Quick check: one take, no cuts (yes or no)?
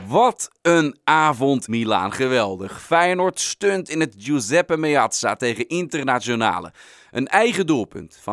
no